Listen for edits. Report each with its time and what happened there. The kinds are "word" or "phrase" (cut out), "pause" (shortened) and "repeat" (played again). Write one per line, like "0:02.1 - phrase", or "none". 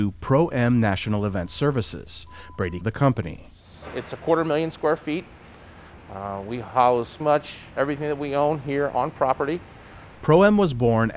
0:02.8 - phrase
0:07.2 - word